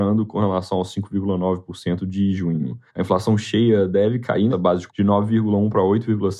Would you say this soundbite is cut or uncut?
cut